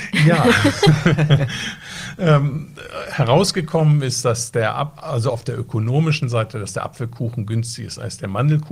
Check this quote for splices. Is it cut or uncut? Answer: uncut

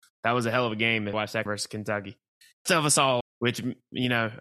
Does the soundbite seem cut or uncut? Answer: cut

